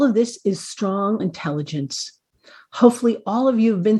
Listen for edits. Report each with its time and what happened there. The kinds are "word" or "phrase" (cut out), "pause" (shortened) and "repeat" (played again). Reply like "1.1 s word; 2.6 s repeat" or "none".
1.2 s word